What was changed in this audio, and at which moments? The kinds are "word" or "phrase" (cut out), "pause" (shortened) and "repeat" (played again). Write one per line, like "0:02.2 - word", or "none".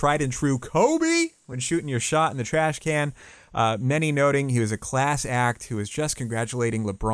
none